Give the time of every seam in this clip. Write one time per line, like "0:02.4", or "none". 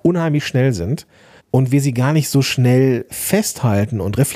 0:01.4